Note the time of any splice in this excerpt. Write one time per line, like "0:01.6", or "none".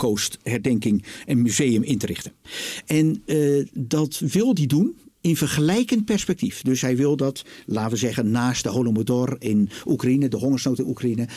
none